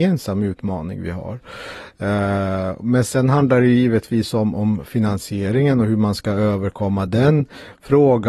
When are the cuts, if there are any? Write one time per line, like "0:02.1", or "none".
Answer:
none